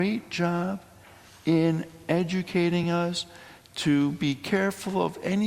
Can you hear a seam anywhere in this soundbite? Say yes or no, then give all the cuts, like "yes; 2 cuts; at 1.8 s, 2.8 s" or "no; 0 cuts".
no; 0 cuts